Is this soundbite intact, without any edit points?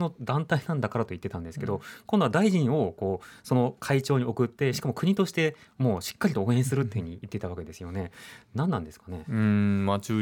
yes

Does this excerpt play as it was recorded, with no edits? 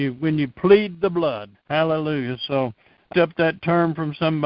no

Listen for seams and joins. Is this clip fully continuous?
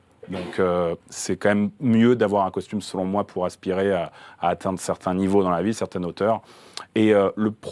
no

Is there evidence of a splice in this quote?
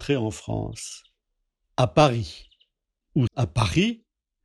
yes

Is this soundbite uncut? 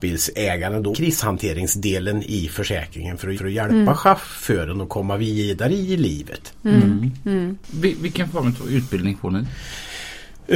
no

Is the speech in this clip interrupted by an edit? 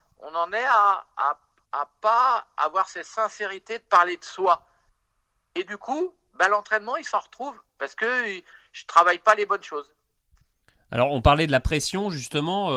no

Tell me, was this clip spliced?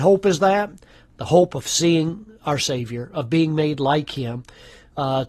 no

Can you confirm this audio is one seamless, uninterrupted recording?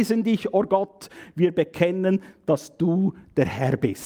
yes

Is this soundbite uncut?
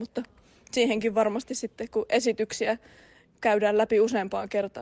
yes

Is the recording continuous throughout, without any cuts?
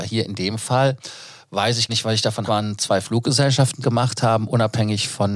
no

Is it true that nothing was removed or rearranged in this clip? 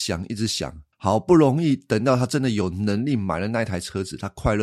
no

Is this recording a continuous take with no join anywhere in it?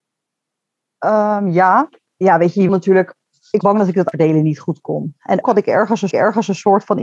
no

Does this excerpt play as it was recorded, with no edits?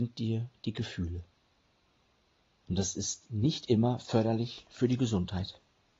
yes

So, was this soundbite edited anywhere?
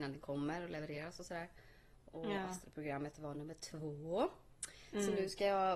no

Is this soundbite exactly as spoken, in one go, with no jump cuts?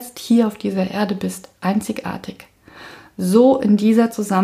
no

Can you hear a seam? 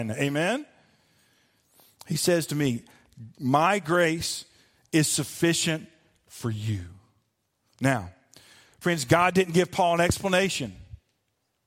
no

